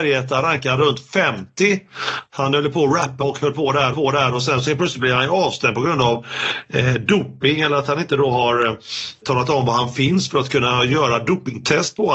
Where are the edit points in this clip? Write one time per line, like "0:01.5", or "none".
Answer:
0:03.2
0:03.9
0:09.2